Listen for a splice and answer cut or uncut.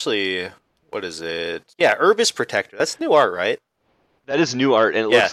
uncut